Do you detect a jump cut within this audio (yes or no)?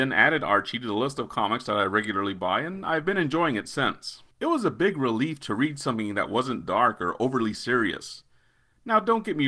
yes